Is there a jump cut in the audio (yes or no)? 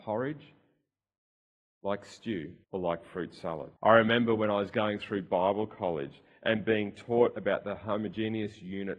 yes